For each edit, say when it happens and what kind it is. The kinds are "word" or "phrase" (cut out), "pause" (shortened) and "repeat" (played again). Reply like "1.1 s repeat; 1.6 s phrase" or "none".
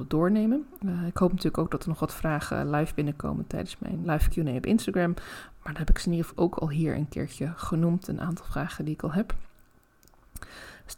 4.0 s word; 6.3 s word